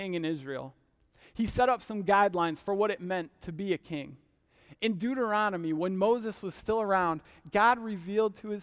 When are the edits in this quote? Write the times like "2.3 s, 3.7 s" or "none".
none